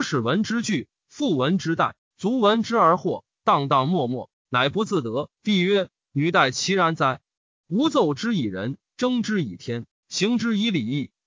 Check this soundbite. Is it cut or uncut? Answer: cut